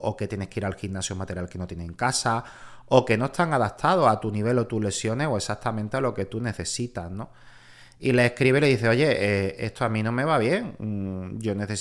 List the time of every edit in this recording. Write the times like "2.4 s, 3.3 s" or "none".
none